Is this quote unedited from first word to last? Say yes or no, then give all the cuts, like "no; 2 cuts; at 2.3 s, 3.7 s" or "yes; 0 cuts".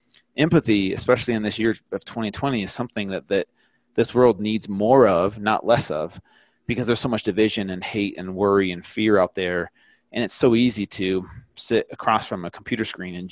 yes; 0 cuts